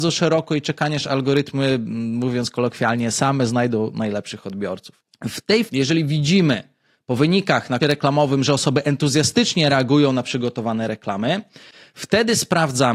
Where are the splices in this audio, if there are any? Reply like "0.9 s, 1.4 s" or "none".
5.7 s, 7.8 s